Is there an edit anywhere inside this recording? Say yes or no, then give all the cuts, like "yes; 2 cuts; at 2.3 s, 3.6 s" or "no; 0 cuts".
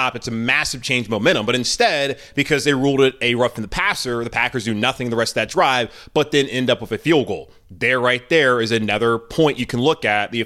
no; 0 cuts